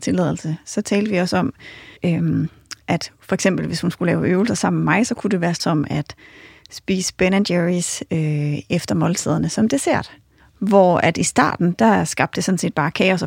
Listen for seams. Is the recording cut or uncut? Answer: cut